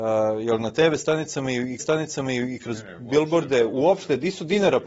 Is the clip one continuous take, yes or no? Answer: no